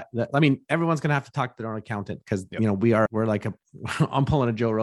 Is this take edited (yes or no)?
no